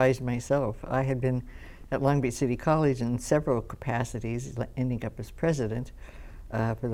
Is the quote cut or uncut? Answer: uncut